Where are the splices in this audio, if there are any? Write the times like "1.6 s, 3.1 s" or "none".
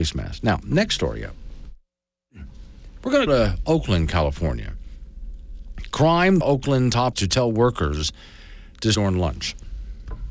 3.3 s, 6.4 s, 7.1 s, 8.9 s